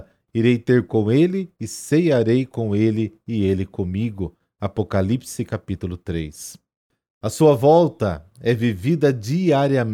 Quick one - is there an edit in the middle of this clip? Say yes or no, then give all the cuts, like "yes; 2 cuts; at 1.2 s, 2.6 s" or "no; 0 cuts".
no; 0 cuts